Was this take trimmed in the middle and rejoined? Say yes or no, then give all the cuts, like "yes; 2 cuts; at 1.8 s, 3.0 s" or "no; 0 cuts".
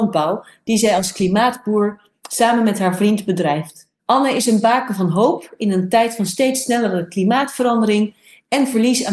yes; 1 cut; at 4.0 s